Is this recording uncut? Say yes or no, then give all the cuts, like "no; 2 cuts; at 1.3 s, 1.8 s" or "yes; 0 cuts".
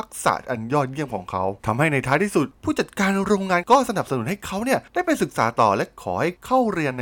no; 1 cut; at 1.6 s